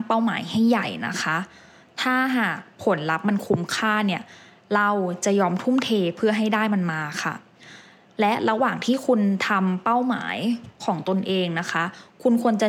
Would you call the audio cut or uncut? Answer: uncut